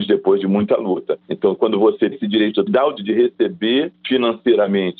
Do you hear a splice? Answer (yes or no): yes